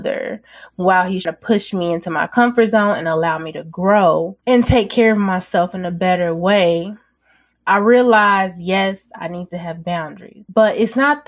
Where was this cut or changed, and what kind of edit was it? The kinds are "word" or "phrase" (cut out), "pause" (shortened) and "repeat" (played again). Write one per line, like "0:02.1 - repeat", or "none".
0:01.2 - word